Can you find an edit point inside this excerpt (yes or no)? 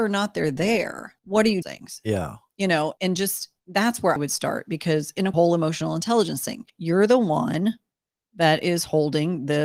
yes